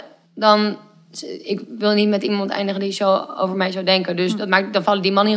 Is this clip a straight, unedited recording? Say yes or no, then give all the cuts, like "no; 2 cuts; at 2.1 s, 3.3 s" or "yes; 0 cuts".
yes; 0 cuts